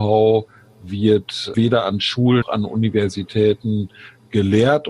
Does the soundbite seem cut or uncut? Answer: cut